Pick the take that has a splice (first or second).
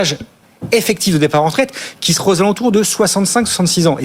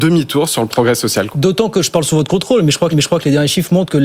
second